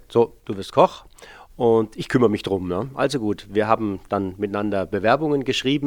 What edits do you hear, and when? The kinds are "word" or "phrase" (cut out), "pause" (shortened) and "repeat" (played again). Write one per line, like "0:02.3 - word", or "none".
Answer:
none